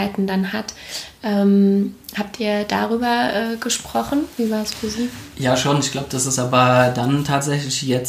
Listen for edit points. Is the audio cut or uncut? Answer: uncut